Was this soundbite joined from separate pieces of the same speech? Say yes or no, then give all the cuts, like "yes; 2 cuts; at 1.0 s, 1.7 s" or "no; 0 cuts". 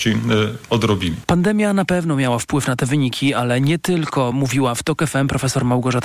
no; 0 cuts